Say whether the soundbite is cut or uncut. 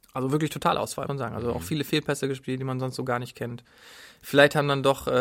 cut